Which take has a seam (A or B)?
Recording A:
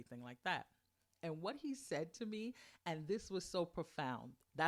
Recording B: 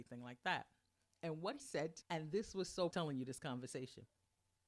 B